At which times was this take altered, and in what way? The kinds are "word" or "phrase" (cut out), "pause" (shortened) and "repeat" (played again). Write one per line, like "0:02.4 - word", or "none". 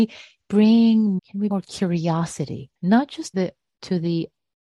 0:01.2 - word
0:01.5 - word
0:02.8 - pause
0:03.3 - word